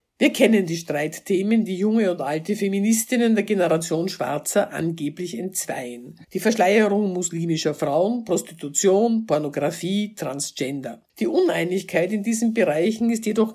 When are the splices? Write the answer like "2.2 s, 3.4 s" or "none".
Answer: 6.2 s, 11.1 s

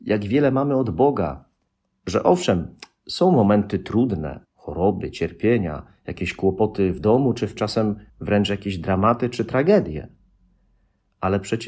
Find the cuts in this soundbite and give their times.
1.7 s, 4.4 s, 7.6 s, 8.1 s

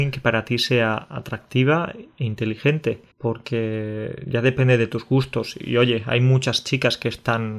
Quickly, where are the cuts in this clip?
3.1 s

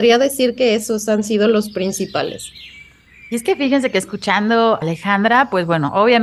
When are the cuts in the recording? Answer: 4.8 s

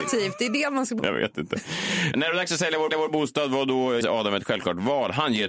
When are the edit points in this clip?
1.0 s, 2.1 s, 2.9 s, 4.0 s

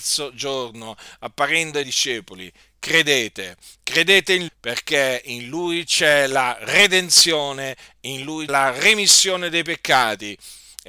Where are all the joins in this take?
1.8 s, 4.5 s, 8.5 s

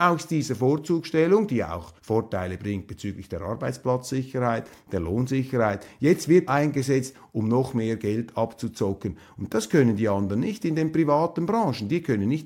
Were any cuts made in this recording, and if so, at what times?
2.0 s, 6.5 s

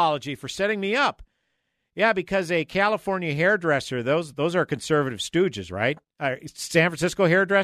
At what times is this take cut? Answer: none

